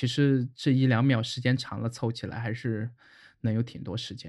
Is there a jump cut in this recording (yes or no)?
no